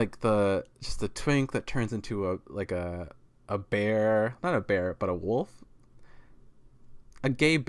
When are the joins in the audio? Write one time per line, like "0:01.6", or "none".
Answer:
none